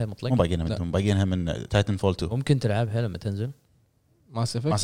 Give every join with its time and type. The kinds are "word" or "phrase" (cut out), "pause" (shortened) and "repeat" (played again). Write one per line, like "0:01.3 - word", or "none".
none